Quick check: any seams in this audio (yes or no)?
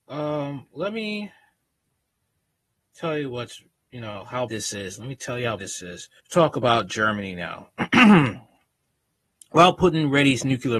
yes